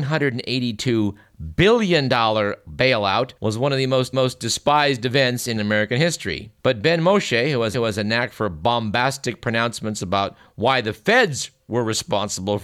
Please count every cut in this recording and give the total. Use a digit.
5